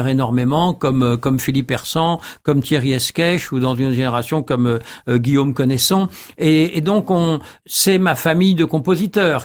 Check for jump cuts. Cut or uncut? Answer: uncut